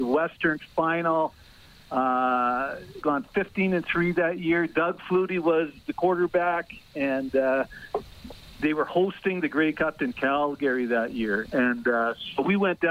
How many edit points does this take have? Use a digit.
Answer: 1